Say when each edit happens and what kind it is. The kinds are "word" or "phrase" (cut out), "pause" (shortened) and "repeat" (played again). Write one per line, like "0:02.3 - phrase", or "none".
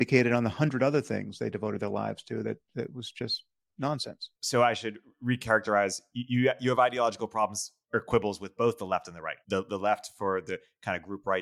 0:02.7 - pause
0:04.3 - pause
0:07.8 - pause
0:09.4 - pause